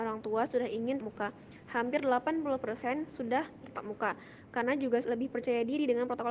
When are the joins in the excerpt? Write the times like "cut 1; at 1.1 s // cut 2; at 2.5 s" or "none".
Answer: cut 1; at 1.0 s // cut 2; at 3.6 s // cut 3; at 5.0 s

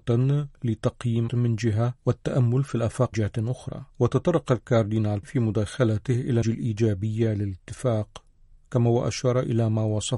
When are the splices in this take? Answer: cut 1; at 1.3 s // cut 2; at 2.0 s // cut 3; at 3.1 s // cut 4; at 3.9 s // cut 5; at 5.2 s // cut 6; at 6.4 s

